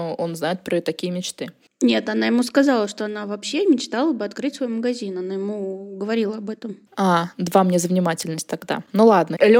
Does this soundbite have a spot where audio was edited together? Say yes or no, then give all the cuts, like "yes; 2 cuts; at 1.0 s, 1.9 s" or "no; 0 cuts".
yes; 1 cut; at 6.9 s